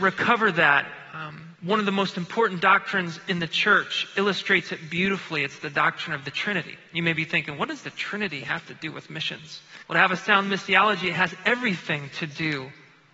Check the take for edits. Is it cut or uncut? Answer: cut